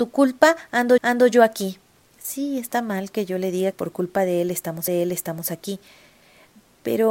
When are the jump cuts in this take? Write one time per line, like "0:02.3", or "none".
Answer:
0:01.0
0:02.0
0:03.7
0:04.9